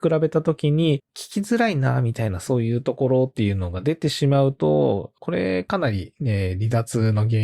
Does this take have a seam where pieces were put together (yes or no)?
yes